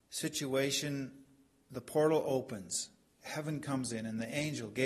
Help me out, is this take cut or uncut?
uncut